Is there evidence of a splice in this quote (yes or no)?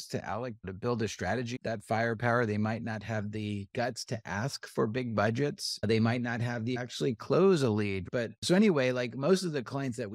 yes